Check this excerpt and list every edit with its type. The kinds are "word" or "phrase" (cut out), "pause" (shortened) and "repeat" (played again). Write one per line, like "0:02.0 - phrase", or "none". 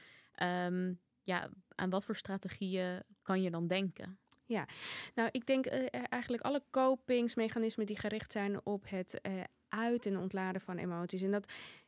none